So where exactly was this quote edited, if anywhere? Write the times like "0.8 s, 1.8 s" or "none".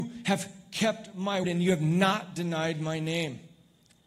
1.4 s